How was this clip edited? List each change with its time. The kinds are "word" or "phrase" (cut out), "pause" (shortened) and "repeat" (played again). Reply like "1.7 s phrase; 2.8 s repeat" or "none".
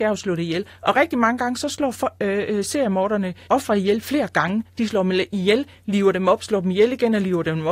3.5 s word